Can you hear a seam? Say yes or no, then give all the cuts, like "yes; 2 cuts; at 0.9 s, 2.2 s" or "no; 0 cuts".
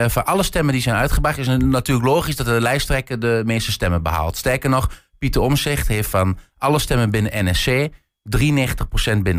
no; 0 cuts